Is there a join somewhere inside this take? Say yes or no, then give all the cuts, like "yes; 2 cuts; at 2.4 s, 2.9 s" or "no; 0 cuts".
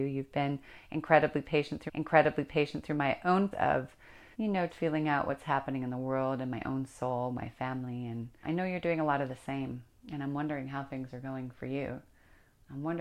yes; 5 cuts; at 1.9 s, 3.5 s, 4.3 s, 4.7 s, 8.4 s